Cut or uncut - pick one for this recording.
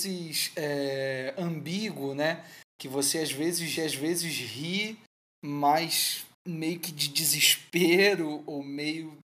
cut